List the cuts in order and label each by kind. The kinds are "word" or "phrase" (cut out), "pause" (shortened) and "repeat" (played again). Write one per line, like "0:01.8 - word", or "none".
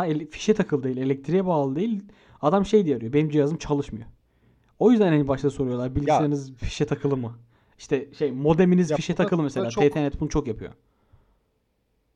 none